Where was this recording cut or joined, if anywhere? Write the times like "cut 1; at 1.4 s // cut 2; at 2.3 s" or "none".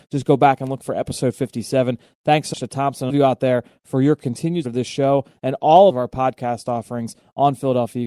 cut 1; at 2.5 s // cut 2; at 3.1 s // cut 3; at 4.6 s // cut 4; at 5.9 s